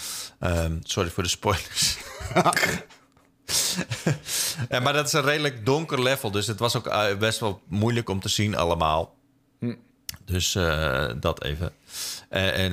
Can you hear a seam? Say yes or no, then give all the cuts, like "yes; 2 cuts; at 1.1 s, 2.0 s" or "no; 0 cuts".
no; 0 cuts